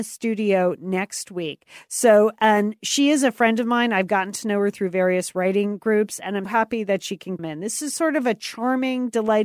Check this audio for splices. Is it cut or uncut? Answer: cut